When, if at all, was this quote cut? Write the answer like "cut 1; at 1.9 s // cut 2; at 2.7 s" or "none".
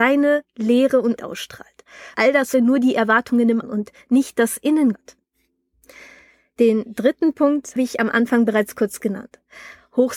cut 1; at 1.2 s // cut 2; at 2.1 s // cut 3; at 2.5 s // cut 4; at 3.6 s // cut 5; at 4.9 s // cut 6; at 7.8 s